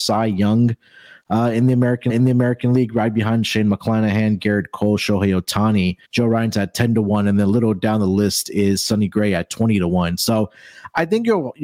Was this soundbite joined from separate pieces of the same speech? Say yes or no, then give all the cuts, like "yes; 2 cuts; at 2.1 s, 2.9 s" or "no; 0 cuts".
yes; 2 cuts; at 2.1 s, 6.0 s